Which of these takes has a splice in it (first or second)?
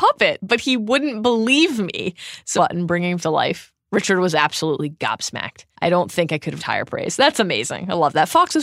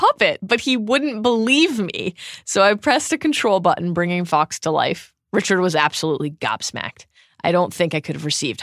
first